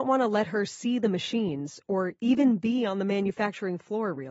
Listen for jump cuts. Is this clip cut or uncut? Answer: uncut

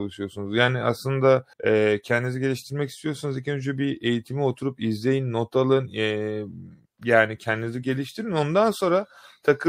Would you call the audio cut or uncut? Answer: cut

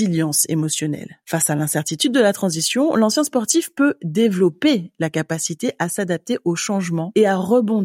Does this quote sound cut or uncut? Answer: uncut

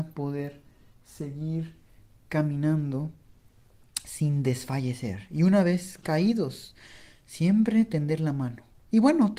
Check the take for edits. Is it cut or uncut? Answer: uncut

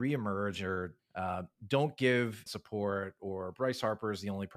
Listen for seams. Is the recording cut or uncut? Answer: cut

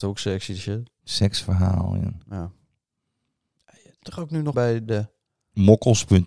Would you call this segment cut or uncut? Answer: cut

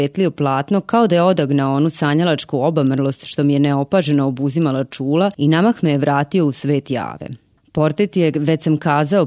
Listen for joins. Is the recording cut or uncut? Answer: uncut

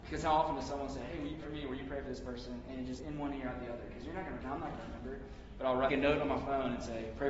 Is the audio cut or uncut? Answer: cut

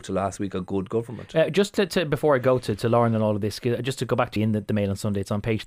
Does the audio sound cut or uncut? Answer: cut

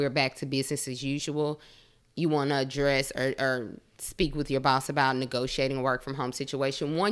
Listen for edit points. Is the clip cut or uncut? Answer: uncut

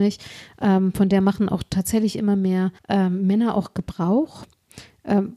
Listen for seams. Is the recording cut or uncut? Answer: cut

